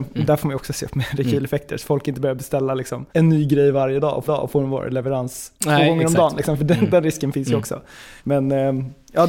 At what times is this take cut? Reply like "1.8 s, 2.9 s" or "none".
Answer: 3.1 s, 4.3 s, 5.6 s, 8.2 s